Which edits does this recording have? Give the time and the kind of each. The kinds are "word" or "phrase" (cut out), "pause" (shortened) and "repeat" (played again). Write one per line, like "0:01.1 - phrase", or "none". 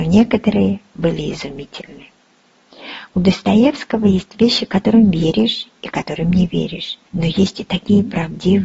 0:07.1 - pause